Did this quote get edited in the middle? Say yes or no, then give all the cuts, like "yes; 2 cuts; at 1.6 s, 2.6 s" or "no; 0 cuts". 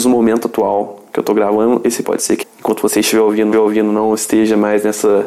yes; 3 cuts; at 2.0 s, 2.4 s, 3.5 s